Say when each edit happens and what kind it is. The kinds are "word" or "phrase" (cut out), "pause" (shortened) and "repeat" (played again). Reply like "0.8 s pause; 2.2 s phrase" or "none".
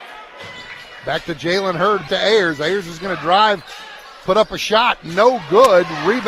2.1 s word